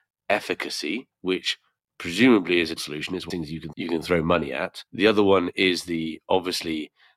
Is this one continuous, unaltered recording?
no; 5 cuts; at 1.1 s, 2.8 s, 3.3 s, 3.7 s, 4.9 s

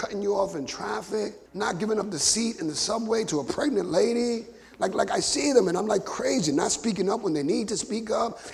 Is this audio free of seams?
no; 2 cuts; at 1.5 s, 4.6 s

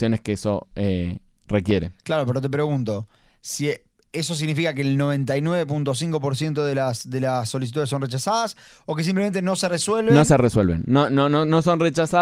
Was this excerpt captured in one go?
yes; 0 cuts

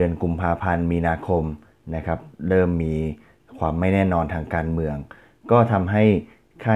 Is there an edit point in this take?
no; 0 cuts

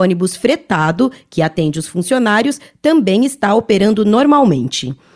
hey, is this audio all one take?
yes; 0 cuts

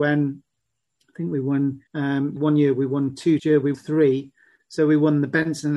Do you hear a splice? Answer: yes; 4 cuts; at 1.9 s, 2.4 s, 3.4 s, 3.7 s

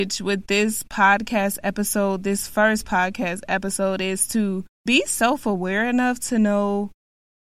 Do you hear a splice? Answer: yes; 1 cut; at 4.7 s

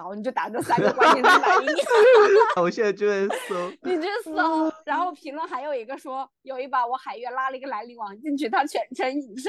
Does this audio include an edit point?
yes; 1 cut; at 2.6 s

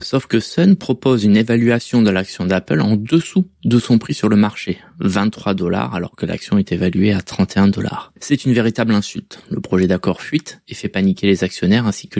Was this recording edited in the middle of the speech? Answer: no; 0 cuts

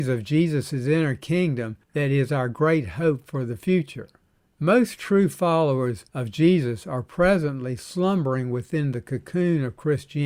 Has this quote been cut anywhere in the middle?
yes; 3 cuts; at 1.8 s, 4.2 s, 6.1 s

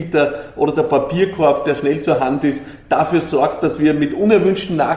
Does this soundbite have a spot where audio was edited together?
no; 0 cuts

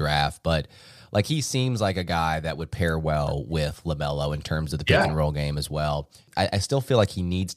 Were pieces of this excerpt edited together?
no; 0 cuts

